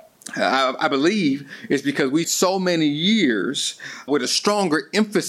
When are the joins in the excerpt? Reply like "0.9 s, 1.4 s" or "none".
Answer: 2.2 s, 4.1 s